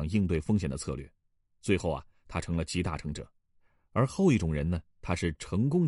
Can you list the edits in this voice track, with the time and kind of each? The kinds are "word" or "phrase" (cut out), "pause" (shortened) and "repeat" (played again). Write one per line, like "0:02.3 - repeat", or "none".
none